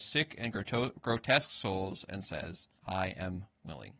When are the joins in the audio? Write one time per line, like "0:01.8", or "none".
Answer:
0:02.8

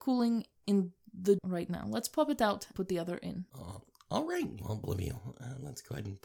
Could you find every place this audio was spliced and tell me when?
0:01.4
0:02.7
0:03.5
0:04.8

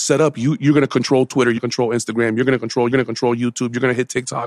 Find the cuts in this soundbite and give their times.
0:01.6
0:02.9

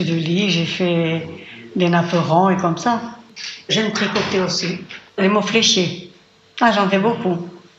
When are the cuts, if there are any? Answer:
none

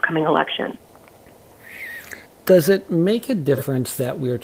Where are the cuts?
0:02.3

